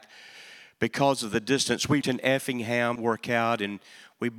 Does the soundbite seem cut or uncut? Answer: cut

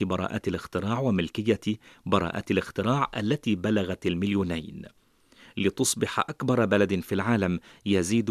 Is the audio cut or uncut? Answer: uncut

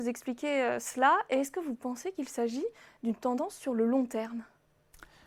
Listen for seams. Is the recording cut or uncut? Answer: uncut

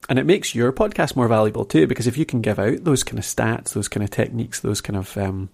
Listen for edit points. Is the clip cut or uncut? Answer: uncut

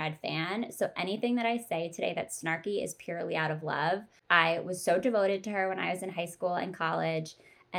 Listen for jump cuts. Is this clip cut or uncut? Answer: uncut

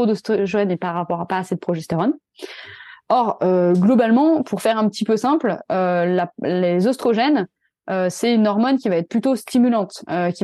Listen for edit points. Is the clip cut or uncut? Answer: uncut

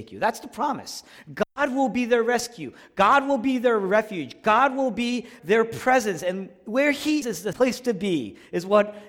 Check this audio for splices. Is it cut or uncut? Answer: cut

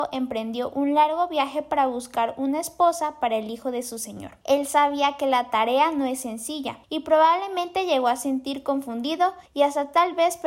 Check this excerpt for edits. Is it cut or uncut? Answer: cut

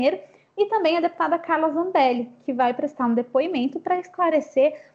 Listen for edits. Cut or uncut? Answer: uncut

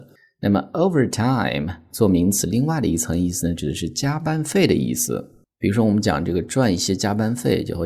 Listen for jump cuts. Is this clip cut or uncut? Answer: uncut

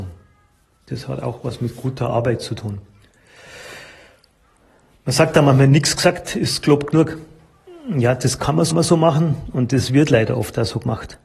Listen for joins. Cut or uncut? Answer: cut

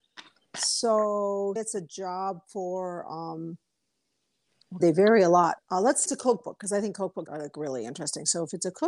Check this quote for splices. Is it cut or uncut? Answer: cut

